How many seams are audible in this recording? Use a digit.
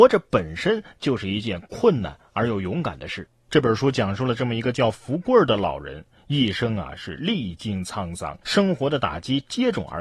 1